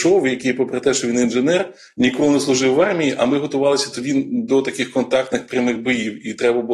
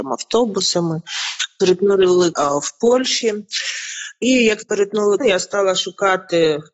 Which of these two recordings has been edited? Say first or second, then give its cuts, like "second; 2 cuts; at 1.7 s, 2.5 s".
second; 3 cuts; at 2.3 s, 4.6 s, 5.2 s